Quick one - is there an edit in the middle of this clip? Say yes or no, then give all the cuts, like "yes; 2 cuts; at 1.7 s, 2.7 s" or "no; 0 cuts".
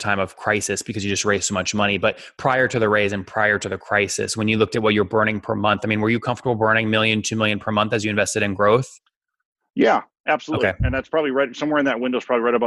no; 0 cuts